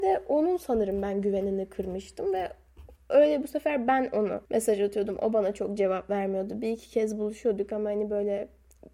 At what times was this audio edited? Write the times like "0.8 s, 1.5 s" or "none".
4.5 s